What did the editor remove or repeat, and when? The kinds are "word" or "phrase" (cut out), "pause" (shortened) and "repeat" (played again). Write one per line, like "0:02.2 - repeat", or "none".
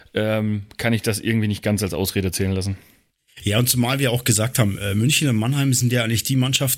0:03.1 - pause

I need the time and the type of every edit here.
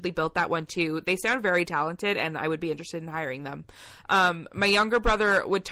none

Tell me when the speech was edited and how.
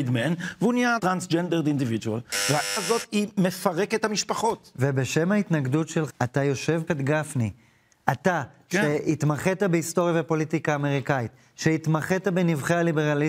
0:01.0 - phrase
0:02.8 - word
0:06.1 - word
0:06.9 - phrase

